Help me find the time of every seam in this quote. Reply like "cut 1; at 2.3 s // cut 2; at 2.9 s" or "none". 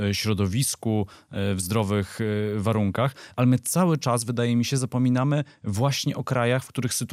none